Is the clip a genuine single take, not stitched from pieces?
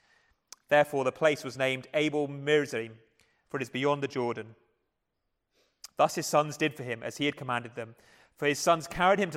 yes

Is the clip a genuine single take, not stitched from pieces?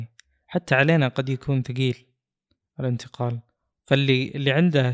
yes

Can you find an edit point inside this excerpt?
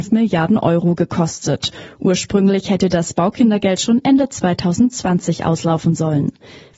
no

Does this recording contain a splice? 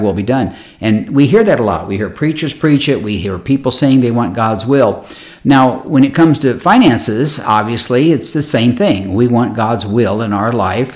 no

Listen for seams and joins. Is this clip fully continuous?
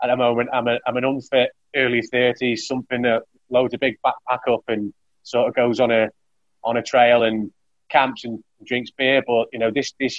yes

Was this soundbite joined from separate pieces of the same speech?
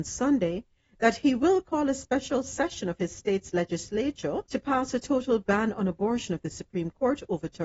yes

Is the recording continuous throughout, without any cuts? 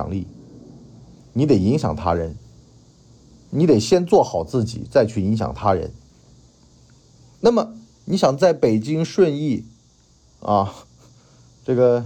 yes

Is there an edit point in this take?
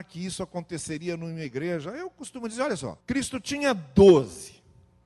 yes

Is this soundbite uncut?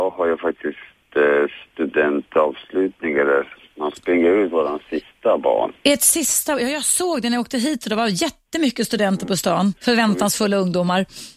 no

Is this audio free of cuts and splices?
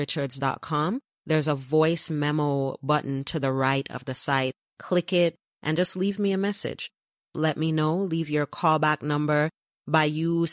yes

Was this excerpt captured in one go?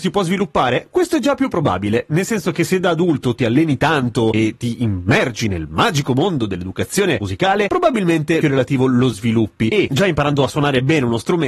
no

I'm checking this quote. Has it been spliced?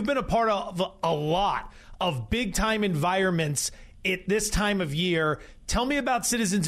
no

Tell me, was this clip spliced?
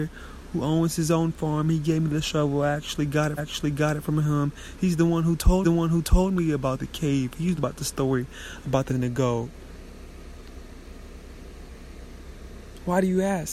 yes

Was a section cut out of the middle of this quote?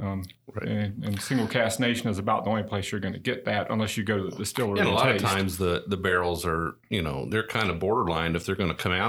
no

